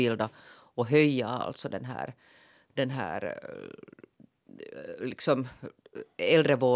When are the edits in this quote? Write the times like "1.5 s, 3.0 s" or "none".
none